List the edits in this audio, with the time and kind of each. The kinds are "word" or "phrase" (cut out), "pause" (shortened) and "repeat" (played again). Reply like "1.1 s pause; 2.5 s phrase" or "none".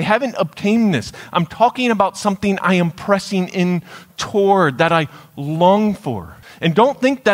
6.4 s pause